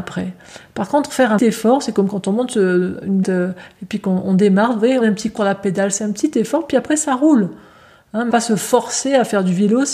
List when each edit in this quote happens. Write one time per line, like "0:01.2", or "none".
0:01.4
0:03.2
0:05.0
0:05.4
0:08.3